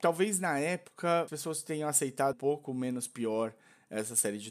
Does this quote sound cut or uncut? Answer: cut